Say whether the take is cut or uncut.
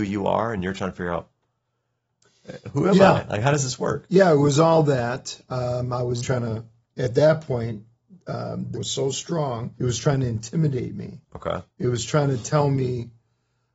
cut